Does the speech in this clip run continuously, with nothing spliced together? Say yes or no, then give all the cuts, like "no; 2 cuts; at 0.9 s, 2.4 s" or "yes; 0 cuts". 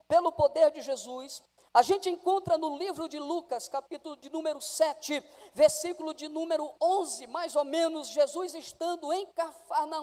yes; 0 cuts